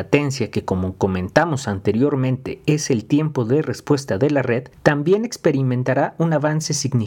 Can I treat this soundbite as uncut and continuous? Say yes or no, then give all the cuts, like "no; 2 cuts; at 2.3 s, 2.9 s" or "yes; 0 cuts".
no; 1 cut; at 4.7 s